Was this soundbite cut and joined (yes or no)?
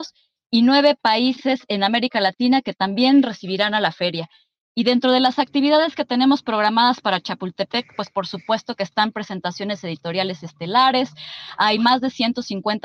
no